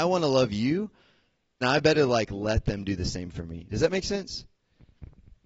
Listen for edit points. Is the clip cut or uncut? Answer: cut